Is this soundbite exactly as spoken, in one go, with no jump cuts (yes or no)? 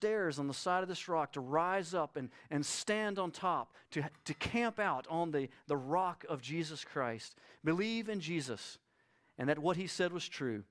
yes